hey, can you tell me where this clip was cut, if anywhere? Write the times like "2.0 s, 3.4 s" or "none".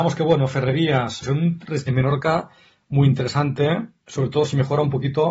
1.2 s, 1.9 s